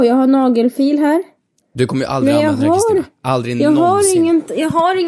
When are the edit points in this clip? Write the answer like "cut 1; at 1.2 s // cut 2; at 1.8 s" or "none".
none